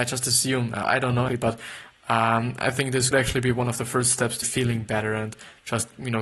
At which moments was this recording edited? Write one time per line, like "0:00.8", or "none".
0:01.3
0:03.1
0:04.4